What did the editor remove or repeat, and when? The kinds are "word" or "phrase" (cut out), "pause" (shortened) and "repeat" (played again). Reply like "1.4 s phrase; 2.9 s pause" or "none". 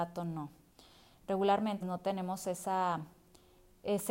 1.8 s word